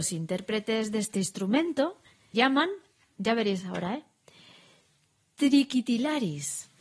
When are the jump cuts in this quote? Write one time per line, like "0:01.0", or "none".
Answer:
0:02.3